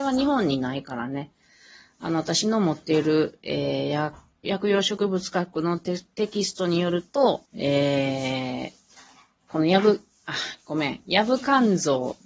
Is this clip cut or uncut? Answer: cut